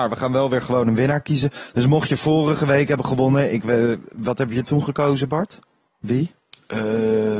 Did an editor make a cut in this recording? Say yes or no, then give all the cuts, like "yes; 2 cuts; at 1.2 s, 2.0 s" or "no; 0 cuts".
no; 0 cuts